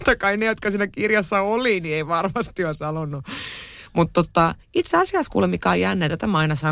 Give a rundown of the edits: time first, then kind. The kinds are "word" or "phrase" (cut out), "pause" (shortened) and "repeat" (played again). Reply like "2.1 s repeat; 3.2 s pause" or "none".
4.6 s pause